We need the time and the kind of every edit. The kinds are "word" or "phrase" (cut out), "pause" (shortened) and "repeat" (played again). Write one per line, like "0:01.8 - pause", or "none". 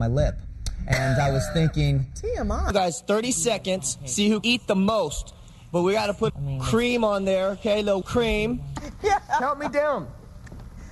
0:04.4 - word
0:06.3 - phrase
0:08.0 - word